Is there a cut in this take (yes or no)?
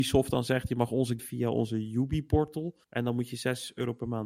yes